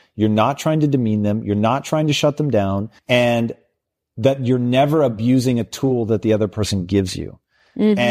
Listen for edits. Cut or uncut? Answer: cut